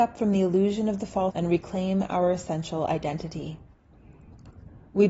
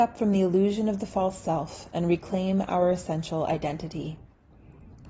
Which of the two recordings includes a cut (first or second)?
first